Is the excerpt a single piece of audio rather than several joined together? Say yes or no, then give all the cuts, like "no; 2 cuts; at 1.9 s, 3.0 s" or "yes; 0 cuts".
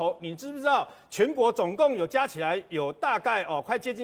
yes; 0 cuts